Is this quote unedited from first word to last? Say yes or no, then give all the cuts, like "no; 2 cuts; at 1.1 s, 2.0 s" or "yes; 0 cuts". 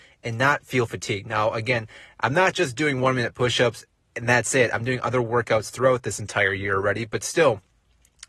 yes; 0 cuts